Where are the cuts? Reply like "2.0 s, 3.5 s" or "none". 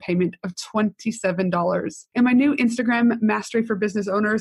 2.1 s